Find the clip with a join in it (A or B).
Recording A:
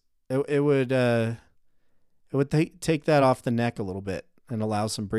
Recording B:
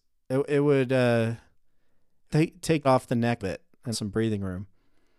B